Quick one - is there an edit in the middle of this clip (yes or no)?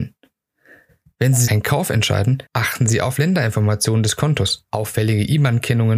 yes